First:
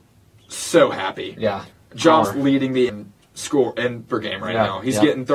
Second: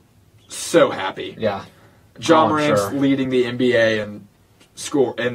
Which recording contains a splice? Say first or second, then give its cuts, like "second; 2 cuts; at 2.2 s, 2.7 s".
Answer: first; 5 cuts; at 1.7 s, 2.2 s, 2.9 s, 3.2 s, 4.1 s